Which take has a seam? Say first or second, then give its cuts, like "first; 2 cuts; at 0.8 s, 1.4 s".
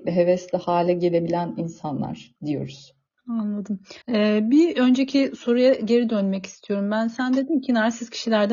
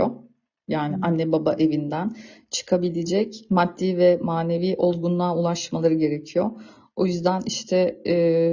first; 2 cuts; at 2.4 s, 4.0 s